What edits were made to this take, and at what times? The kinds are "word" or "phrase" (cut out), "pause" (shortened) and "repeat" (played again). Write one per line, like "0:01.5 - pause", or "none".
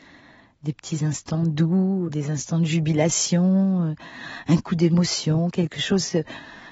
0:02.1 - word